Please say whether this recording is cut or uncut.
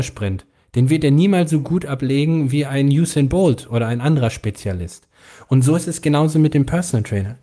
uncut